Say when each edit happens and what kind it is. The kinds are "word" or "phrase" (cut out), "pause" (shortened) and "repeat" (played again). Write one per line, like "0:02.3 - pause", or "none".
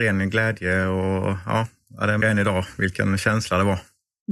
0:02.2 - phrase